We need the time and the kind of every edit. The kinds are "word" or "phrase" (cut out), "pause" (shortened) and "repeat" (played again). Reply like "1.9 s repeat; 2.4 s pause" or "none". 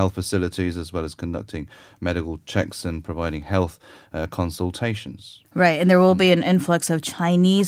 none

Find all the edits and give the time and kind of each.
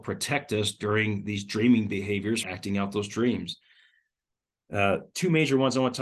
2.4 s word

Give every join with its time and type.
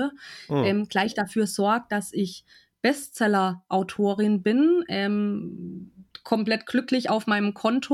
none

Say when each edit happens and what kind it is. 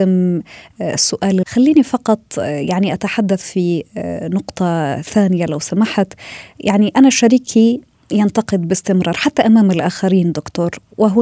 1.4 s word

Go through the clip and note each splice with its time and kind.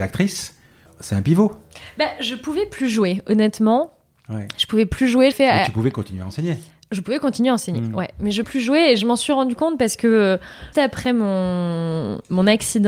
5.3 s word; 8.4 s word; 10.7 s word

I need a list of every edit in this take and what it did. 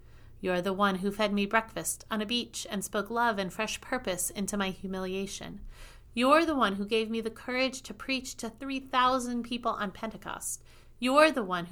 none

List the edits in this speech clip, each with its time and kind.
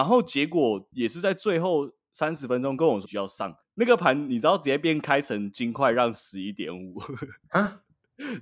3.0 s word

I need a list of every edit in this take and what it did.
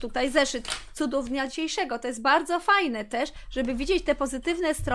none

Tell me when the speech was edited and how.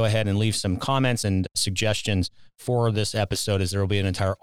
1.2 s word

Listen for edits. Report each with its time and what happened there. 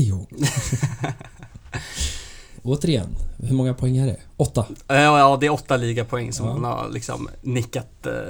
none

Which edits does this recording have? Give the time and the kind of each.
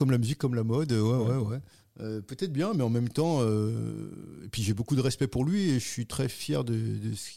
none

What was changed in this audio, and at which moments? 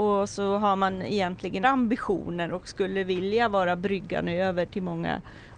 1.6 s word

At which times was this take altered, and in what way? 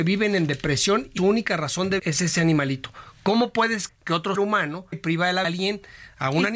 1.2 s word; 2.0 s word; 3.9 s word; 4.4 s word; 4.9 s word; 5.4 s word

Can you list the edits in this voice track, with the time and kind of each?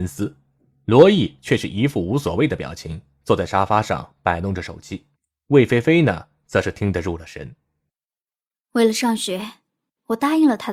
5.1 s pause

